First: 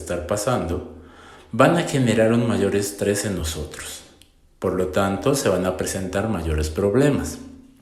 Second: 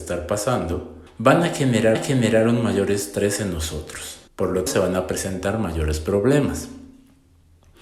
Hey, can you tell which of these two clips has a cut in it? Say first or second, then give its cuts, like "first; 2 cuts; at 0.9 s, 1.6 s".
second; 4 cuts; at 1.1 s, 1.9 s, 4.3 s, 4.7 s